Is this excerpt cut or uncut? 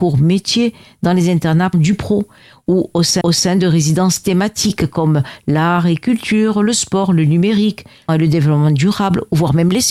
cut